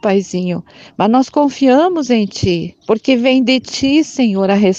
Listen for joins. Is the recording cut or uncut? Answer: cut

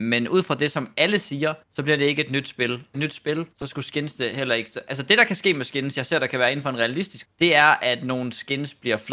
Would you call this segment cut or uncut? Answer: cut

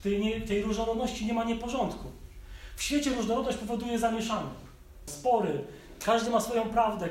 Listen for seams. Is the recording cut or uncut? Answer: cut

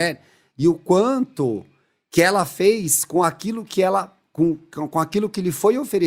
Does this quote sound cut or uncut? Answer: uncut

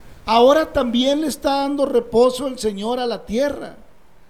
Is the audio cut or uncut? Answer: uncut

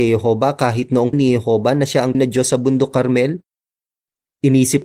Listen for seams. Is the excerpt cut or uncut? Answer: cut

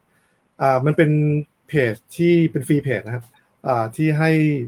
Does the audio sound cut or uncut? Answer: cut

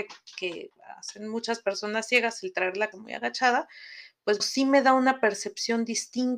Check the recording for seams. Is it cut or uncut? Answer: cut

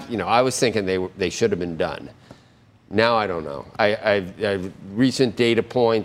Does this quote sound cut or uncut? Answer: uncut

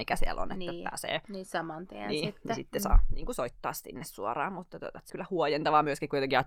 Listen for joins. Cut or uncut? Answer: cut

